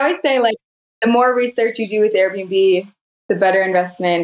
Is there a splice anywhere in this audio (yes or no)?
no